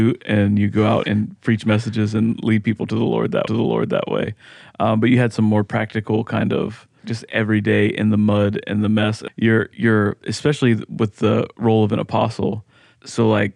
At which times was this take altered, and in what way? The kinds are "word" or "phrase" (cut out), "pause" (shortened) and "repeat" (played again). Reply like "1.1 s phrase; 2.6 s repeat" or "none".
1.0 s word; 3.5 s repeat; 7.0 s word; 9.3 s word